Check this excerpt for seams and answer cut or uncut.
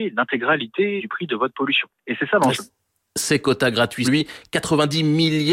cut